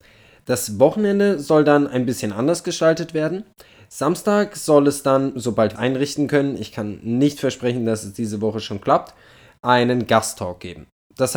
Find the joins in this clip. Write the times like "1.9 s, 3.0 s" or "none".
5.8 s